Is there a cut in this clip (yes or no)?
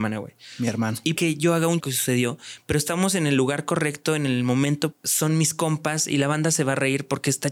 yes